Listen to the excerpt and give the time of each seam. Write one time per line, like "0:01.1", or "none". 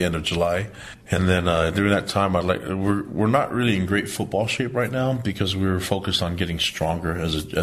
none